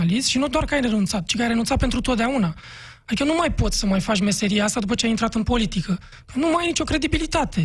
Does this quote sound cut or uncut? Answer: uncut